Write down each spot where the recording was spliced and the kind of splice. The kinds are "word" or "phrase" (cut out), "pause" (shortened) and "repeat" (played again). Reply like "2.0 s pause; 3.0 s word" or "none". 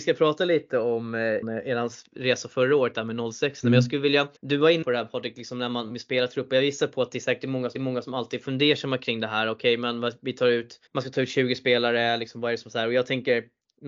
1.4 s word; 4.4 s pause; 4.8 s word; 7.8 s repeat; 10.9 s pause